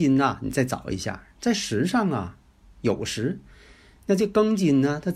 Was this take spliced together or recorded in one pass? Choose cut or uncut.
uncut